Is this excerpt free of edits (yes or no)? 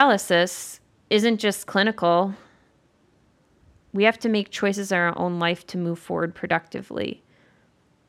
yes